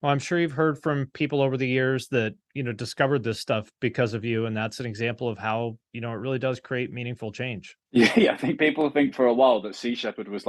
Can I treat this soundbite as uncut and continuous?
yes; 0 cuts

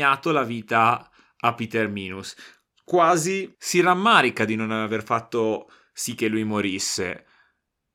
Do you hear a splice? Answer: no; 0 cuts

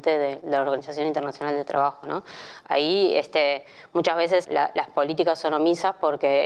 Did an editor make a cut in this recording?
yes; 1 cut; at 4.4 s

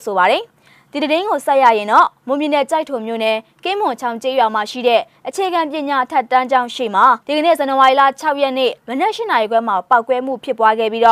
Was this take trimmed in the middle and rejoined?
yes; 1 cut; at 7.2 s

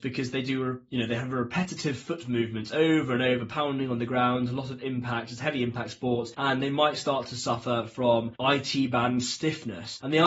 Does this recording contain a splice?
no; 0 cuts

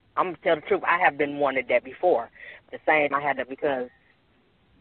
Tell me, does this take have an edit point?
yes; 4 cuts; at 1.7 s, 2.7 s, 3.1 s, 3.4 s

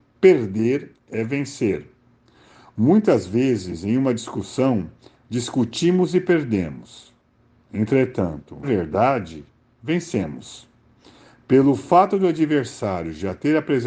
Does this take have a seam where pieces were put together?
yes; 1 cut; at 8.6 s

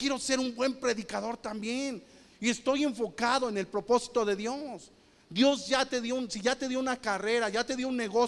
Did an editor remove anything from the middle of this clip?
no; 0 cuts

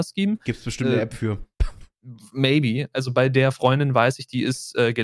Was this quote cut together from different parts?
no; 0 cuts

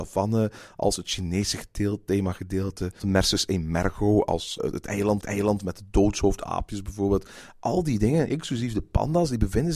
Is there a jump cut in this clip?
yes; 3 cuts; at 3.0 s, 4.6 s, 5.2 s

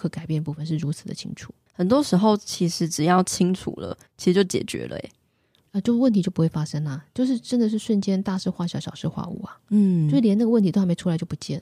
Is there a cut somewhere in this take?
yes; 1 cut; at 4.1 s

